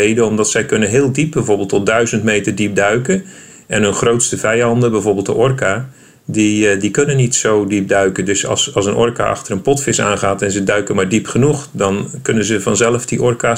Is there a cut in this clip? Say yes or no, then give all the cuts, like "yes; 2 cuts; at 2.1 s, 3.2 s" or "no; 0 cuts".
no; 0 cuts